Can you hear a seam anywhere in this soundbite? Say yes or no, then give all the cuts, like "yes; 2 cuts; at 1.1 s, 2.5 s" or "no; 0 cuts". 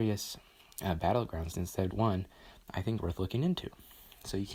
yes; 3 cuts; at 1.5 s, 1.9 s, 3.0 s